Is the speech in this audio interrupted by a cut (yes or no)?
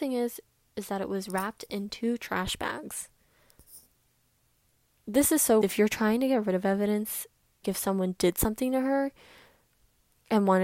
yes